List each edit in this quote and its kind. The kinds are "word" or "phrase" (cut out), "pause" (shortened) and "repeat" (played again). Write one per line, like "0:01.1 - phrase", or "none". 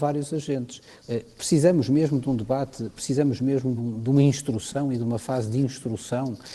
0:03.8 - phrase